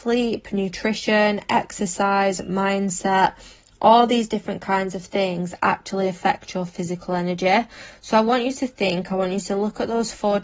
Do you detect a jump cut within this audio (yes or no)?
no